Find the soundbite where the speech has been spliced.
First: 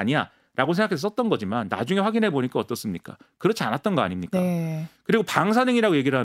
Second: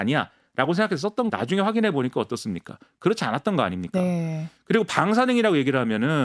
second; 1 cut; at 1.3 s

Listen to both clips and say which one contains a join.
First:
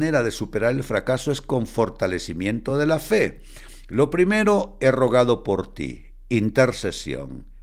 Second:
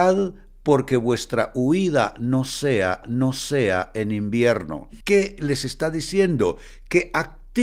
second; 2 cuts; at 3.0 s, 5.0 s

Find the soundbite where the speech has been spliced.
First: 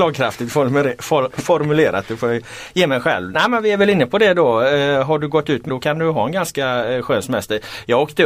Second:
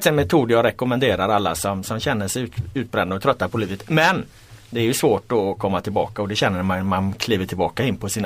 first; 1 cut; at 5.7 s

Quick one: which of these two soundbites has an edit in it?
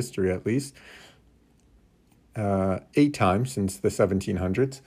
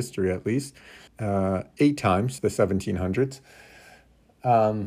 second; 2 cuts; at 1.1 s, 2.4 s

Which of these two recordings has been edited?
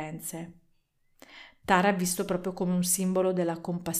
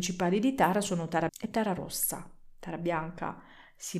second; 1 cut; at 1.3 s

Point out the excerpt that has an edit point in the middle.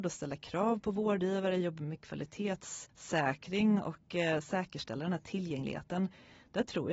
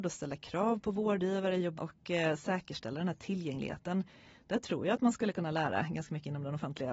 second; 1 cut; at 1.8 s

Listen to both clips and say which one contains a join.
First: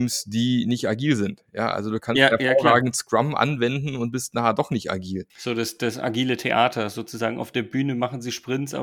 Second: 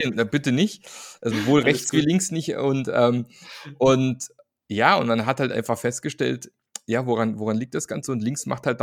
first; 1 cut; at 5.3 s

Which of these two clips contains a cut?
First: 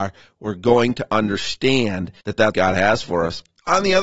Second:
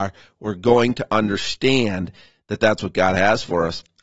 first; 2 cuts; at 2.2 s, 2.5 s

